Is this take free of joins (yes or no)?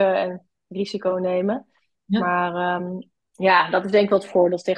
yes